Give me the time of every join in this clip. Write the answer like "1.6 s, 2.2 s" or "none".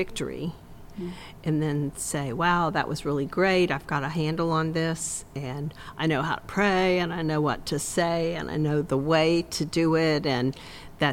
none